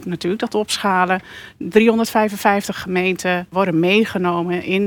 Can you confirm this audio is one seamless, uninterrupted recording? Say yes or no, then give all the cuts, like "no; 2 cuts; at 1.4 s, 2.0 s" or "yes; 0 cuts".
yes; 0 cuts